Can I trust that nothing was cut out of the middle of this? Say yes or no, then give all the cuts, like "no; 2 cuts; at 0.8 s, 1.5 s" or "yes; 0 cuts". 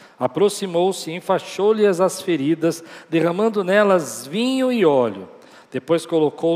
yes; 0 cuts